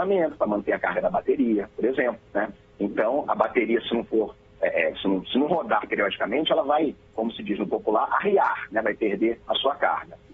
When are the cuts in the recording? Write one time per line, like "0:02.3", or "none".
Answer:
0:02.3
0:09.4

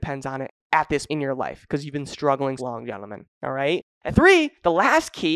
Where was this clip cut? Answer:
0:01.1
0:02.6
0:04.1

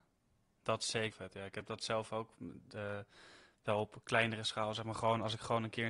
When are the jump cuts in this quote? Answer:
0:01.1

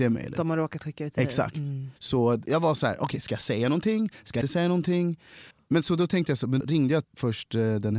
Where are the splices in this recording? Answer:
0:02.0
0:04.4
0:05.5
0:06.6
0:07.0

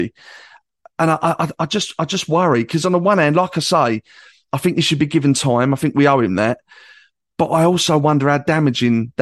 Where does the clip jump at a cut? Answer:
none

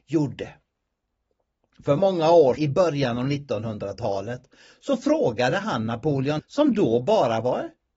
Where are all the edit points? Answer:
0:02.0
0:02.6
0:06.4

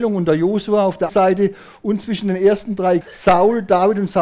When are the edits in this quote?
0:01.1
0:03.0

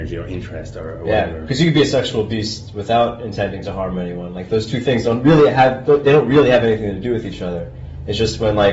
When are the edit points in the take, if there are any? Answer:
none

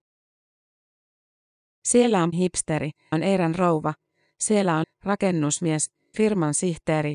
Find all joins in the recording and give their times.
0:02.3
0:03.1
0:04.8
0:06.1

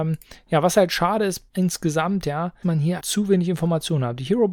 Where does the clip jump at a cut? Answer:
0:01.5
0:02.6
0:03.0

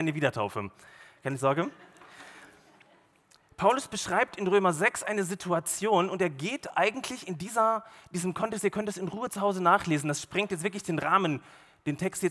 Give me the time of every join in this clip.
none

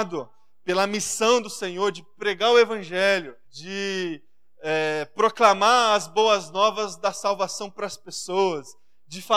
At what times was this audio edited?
0:03.4

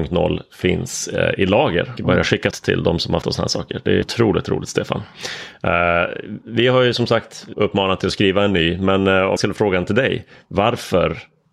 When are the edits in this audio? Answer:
0:02.0
0:02.5
0:03.2
0:04.0
0:07.5
0:09.4

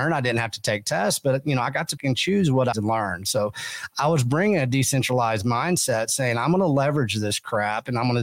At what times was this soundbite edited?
0:02.0
0:02.7

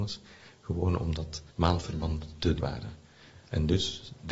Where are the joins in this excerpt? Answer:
0:01.5
0:02.6

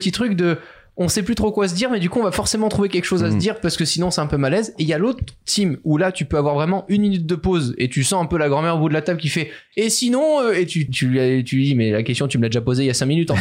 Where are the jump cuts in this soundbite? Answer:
0:10.9

